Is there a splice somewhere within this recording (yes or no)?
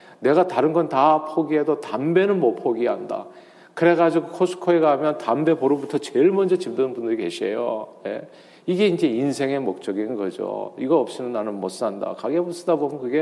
no